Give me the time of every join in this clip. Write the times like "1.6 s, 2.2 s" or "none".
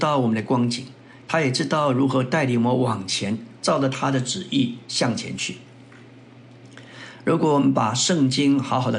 none